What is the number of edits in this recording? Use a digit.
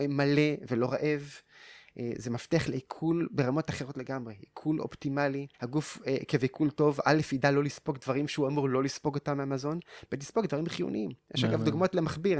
1